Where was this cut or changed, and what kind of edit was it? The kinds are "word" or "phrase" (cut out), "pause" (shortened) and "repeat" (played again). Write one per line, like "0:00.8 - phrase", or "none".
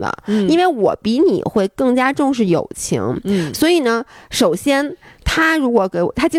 none